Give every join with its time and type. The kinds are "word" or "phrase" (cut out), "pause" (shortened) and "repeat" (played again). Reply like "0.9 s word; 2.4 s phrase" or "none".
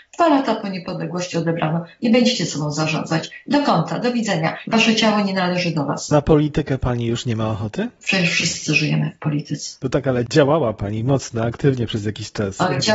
none